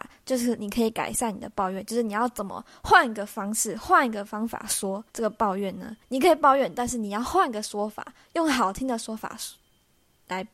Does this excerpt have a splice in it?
yes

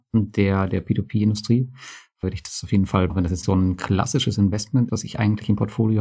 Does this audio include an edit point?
yes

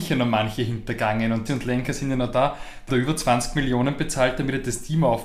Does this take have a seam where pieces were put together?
yes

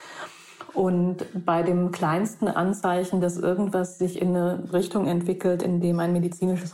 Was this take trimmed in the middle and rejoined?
no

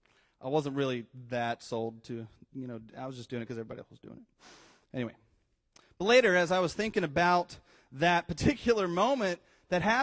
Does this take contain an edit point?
no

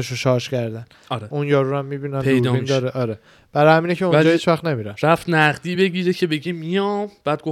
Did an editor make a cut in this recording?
no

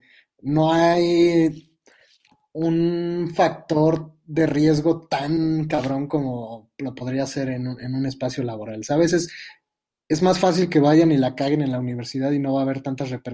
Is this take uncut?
yes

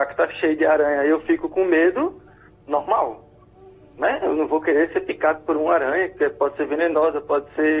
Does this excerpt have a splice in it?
no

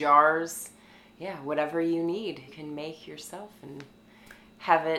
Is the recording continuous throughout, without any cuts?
no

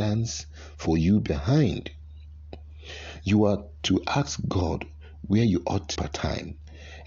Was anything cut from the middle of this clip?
yes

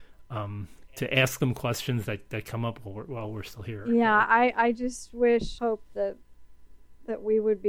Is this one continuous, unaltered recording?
no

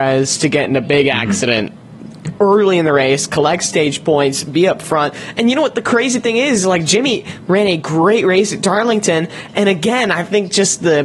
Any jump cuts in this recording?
no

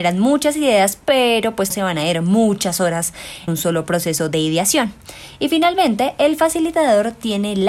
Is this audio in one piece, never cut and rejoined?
no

